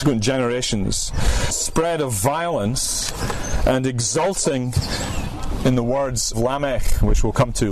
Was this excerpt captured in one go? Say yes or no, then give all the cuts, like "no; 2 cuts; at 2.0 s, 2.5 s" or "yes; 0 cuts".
no; 2 cuts; at 1.5 s, 6.3 s